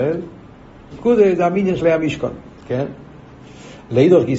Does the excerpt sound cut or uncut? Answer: cut